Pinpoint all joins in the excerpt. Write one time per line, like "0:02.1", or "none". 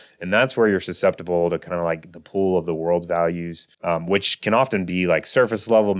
0:03.7